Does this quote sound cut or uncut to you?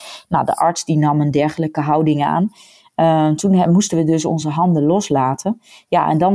uncut